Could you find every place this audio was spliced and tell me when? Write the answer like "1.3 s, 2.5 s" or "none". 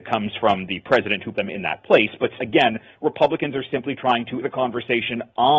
1.3 s, 2.4 s, 4.4 s

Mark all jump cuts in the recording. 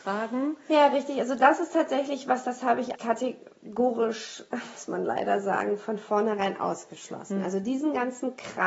2.9 s

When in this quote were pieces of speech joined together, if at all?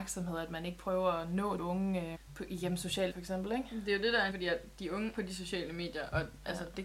1.6 s, 2.1 s, 3.1 s, 4.3 s, 5.1 s

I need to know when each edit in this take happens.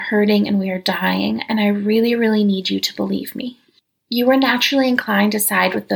none

